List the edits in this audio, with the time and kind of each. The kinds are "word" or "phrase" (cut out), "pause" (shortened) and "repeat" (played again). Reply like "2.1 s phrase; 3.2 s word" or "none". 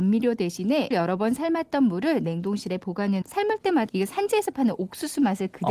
0.9 s word; 3.2 s word; 3.9 s phrase

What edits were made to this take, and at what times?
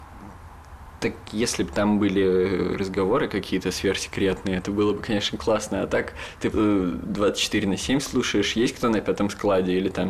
6.5 s word

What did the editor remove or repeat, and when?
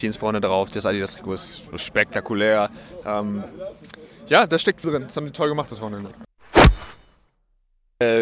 4.8 s word

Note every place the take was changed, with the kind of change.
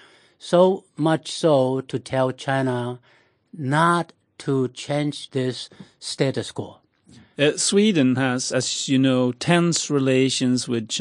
none

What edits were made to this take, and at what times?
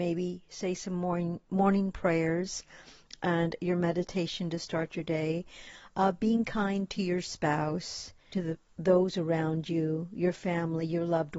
8.3 s phrase

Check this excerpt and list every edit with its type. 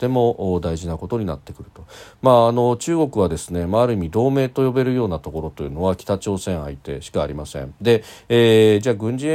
none

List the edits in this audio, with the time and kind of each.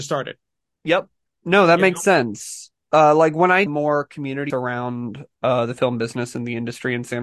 3.7 s word; 4.5 s word

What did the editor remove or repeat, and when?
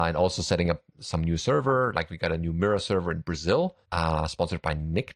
3.8 s pause

